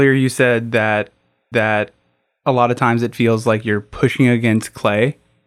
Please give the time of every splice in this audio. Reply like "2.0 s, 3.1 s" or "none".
1.5 s